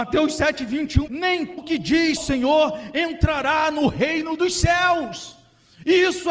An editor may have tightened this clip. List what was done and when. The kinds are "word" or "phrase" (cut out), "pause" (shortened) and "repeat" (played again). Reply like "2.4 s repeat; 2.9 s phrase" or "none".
1.1 s phrase; 1.6 s word; 2.2 s word